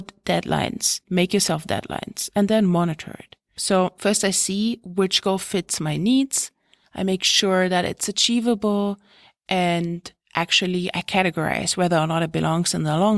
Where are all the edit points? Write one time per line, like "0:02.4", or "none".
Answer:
none